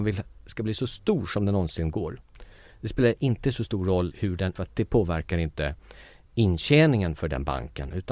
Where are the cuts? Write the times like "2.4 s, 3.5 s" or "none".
4.1 s, 4.6 s